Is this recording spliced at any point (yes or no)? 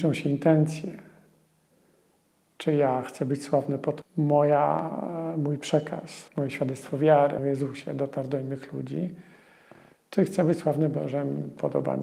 yes